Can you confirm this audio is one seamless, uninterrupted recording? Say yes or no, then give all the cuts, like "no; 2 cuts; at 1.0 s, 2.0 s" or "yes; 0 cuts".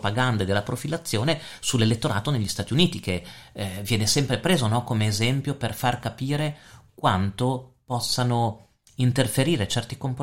yes; 0 cuts